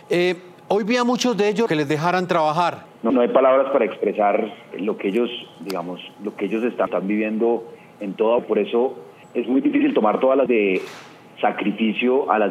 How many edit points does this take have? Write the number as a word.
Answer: seven